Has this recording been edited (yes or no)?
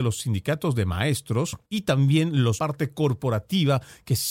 yes